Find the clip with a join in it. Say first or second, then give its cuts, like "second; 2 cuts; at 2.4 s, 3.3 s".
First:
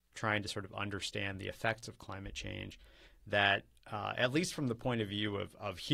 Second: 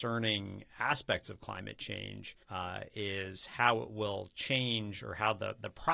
second; 1 cut; at 2.4 s